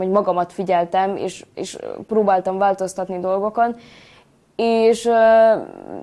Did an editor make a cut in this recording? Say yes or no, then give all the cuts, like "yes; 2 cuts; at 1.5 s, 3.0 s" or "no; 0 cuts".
no; 0 cuts